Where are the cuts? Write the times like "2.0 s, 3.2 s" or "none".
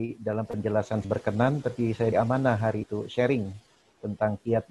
1.0 s, 2.1 s, 2.8 s